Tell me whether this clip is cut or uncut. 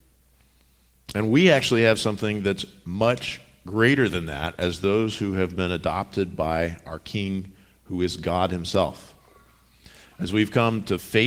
uncut